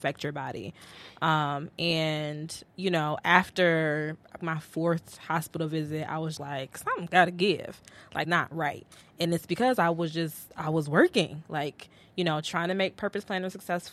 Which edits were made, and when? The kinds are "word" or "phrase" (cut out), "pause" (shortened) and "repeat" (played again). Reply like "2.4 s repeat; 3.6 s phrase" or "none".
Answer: 2.7 s pause; 4.4 s phrase; 6.4 s word; 8.2 s word; 10.5 s pause